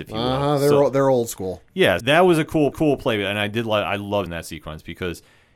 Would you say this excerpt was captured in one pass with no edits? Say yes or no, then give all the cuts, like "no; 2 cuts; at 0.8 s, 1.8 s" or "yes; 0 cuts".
no; 3 cuts; at 2.0 s, 2.7 s, 4.3 s